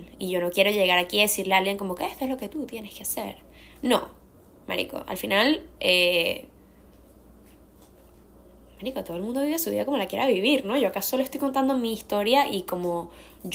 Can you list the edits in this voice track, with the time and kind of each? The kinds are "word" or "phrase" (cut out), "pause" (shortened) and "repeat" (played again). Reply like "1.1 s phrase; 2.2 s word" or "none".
none